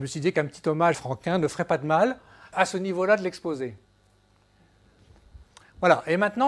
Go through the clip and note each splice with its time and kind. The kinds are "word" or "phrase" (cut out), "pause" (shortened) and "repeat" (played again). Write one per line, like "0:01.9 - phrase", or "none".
0:00.9 - phrase
0:02.5 - word